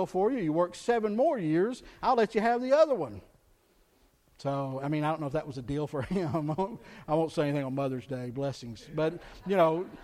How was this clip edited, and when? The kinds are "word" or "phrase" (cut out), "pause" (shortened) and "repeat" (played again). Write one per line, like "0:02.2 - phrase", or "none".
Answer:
none